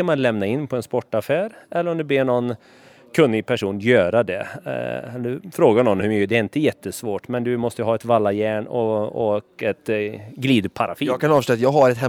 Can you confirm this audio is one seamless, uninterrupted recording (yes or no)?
yes